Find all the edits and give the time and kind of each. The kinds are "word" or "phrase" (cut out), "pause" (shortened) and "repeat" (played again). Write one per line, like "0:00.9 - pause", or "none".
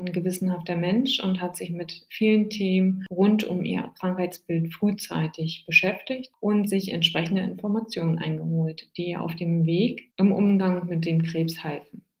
none